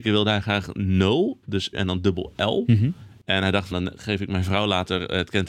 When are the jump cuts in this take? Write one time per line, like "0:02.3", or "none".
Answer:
0:01.7
0:03.7